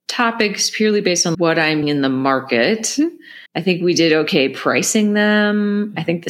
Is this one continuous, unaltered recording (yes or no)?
no